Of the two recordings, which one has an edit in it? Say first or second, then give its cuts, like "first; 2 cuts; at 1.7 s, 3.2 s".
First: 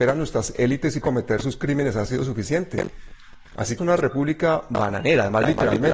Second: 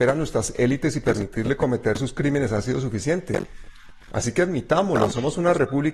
first; 2 cuts; at 1.0 s, 3.8 s